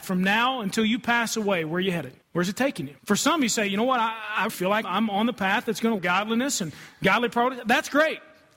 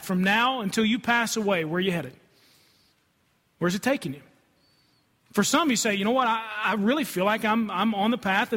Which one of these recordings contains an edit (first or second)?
first